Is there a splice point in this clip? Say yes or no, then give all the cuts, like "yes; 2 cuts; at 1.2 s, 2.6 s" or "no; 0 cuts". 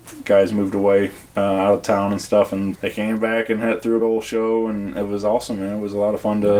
yes; 2 cuts; at 2.7 s, 4.0 s